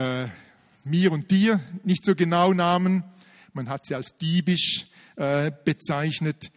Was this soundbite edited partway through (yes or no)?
no